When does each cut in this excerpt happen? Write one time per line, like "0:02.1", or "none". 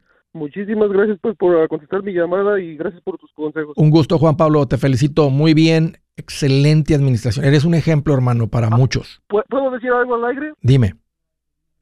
0:09.3

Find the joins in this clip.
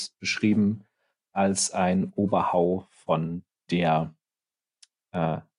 none

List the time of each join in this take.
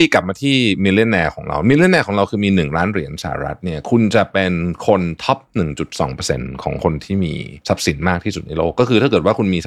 0:07.6

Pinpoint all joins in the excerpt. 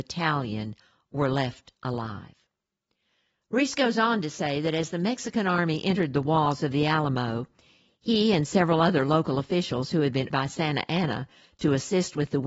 0:10.3

